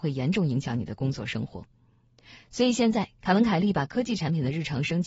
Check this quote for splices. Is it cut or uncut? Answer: uncut